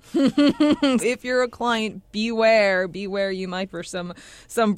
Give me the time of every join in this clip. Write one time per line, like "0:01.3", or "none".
0:01.0
0:03.7